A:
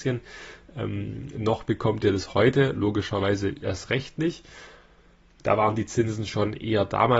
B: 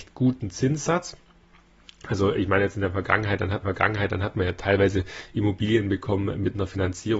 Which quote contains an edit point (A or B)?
B